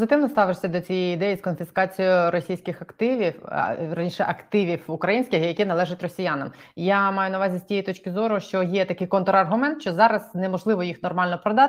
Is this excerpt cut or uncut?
uncut